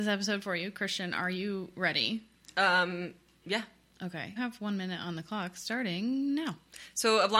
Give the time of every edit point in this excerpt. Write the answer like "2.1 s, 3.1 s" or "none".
4.4 s